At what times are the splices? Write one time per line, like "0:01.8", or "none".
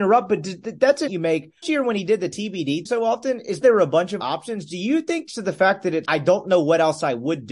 0:01.1
0:01.6
0:02.9
0:03.6
0:04.2
0:05.3
0:06.1